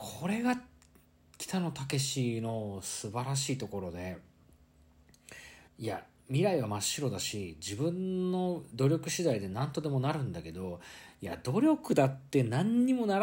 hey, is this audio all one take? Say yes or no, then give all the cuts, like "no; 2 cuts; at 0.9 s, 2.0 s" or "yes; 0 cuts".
no; 1 cut; at 5.7 s